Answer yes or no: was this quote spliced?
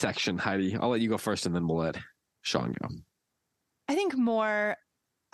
no